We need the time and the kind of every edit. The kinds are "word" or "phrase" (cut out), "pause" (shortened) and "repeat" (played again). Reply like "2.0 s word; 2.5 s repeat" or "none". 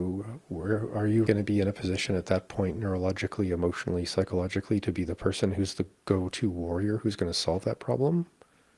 1.3 s word